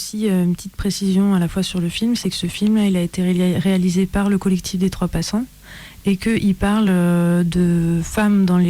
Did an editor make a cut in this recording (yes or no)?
no